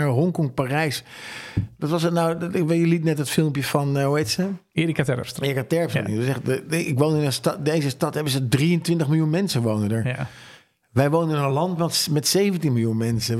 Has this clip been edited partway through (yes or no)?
no